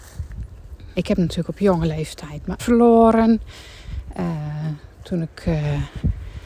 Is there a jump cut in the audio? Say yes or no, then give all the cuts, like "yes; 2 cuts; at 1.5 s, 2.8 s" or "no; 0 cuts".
yes; 2 cuts; at 0.9 s, 2.6 s